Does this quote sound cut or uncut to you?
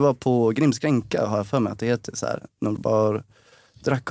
cut